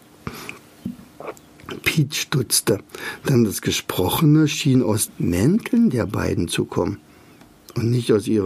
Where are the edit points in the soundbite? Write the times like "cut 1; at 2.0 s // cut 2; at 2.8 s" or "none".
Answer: cut 1; at 5.1 s